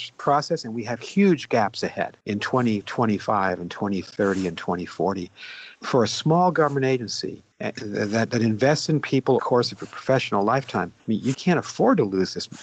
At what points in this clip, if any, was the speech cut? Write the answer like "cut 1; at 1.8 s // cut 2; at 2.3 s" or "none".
cut 1; at 2.2 s // cut 2; at 5.7 s // cut 3; at 7.5 s // cut 4; at 9.4 s // cut 5; at 11.0 s // cut 6; at 11.3 s